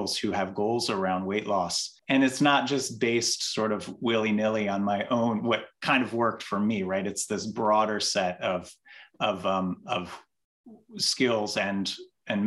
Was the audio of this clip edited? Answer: yes; 1 cut; at 2.0 s

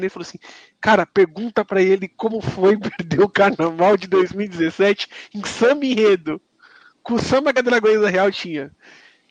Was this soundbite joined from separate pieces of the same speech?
no; 0 cuts

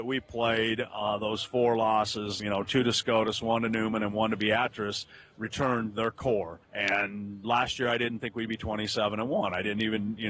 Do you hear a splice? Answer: yes; 2 cuts; at 2.4 s, 6.6 s

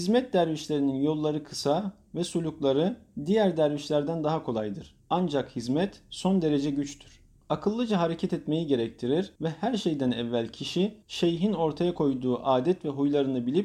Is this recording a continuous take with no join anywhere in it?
no; 4 cuts; at 5.0 s, 7.4 s, 9.4 s, 11.0 s

